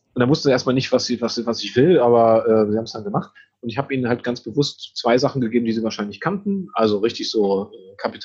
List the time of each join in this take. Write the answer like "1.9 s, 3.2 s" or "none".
none